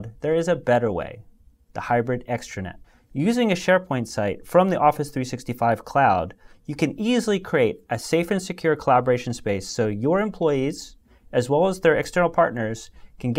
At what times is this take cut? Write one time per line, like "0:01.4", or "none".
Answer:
0:02.8